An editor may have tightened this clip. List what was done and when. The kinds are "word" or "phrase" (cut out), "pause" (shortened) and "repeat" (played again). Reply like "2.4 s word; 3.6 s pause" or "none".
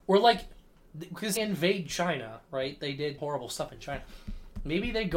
1.4 s word; 3.2 s word